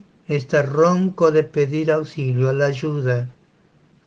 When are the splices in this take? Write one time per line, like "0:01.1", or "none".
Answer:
none